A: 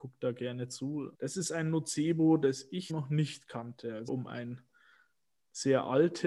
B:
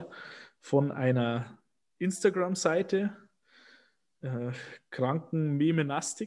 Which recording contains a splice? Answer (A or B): A